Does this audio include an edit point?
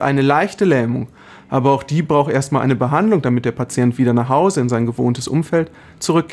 no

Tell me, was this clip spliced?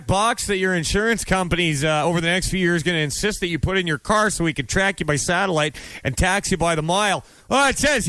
no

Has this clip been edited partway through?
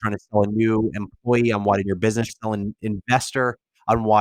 yes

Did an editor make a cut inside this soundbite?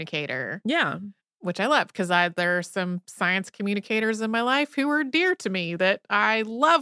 no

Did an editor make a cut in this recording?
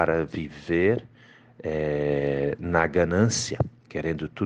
no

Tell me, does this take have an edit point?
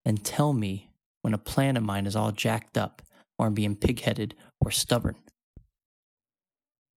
no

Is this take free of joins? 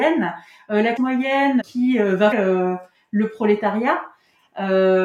no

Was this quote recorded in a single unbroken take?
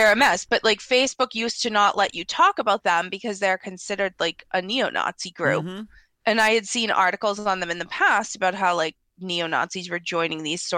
yes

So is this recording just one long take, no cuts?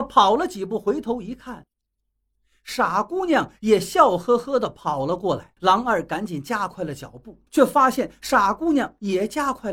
no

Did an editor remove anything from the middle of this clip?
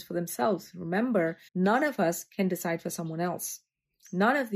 yes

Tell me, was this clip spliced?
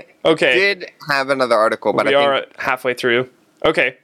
no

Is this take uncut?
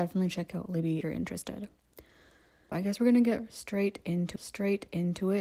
no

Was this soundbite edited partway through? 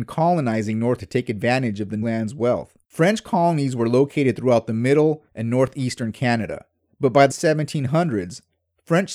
yes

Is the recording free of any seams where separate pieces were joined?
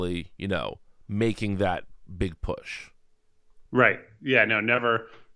no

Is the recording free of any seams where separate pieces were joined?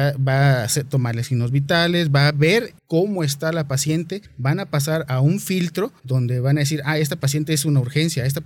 no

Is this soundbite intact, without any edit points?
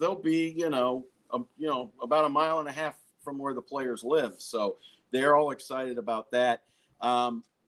yes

